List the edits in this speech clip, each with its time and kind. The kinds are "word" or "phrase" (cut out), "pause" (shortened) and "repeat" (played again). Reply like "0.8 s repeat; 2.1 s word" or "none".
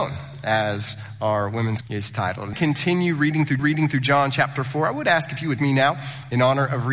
1.8 s word; 2.5 s phrase; 3.6 s repeat; 5.6 s phrase